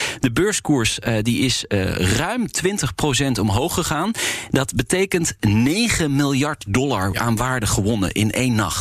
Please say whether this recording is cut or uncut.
uncut